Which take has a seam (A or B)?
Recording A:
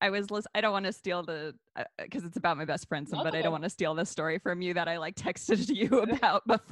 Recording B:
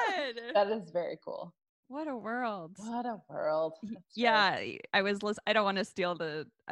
A